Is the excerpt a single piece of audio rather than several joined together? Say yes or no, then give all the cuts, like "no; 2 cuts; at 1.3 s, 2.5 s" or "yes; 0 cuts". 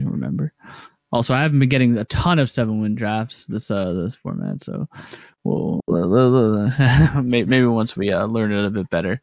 yes; 0 cuts